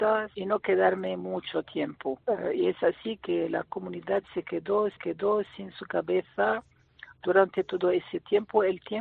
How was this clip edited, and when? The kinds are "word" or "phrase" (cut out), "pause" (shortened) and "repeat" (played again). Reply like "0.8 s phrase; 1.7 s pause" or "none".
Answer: 5.0 s repeat